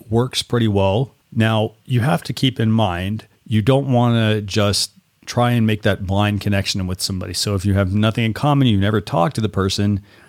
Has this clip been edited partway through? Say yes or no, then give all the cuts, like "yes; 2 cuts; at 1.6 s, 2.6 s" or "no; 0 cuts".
yes; 3 cuts; at 1.2 s, 3.4 s, 5.0 s